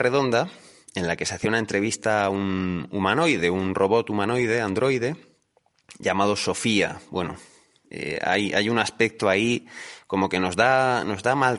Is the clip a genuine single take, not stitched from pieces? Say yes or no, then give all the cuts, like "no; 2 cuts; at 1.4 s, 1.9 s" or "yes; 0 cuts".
yes; 0 cuts